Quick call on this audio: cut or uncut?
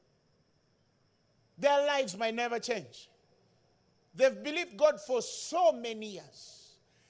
uncut